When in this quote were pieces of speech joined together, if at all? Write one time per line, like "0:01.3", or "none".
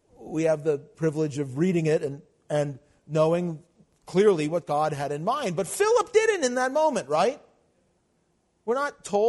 none